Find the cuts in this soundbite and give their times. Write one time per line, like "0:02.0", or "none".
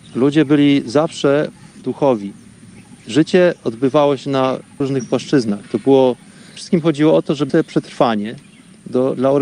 0:01.8
0:04.8
0:06.6
0:07.5